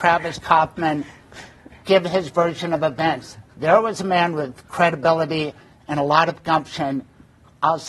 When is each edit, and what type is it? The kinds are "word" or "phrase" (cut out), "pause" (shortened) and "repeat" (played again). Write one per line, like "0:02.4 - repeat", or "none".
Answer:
none